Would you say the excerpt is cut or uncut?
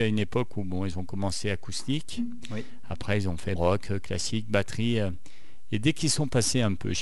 cut